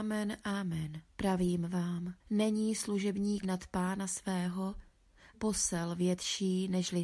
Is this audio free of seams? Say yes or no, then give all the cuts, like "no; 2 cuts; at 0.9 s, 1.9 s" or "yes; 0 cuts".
no; 4 cuts; at 1.1 s, 2.2 s, 3.4 s, 5.3 s